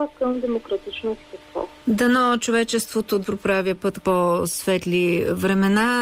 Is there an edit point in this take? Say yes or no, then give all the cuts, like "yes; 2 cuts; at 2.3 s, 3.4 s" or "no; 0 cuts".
yes; 2 cuts; at 3.2 s, 4.0 s